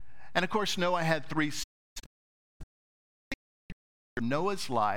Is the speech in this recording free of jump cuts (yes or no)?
yes